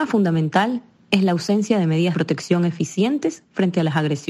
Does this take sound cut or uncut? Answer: cut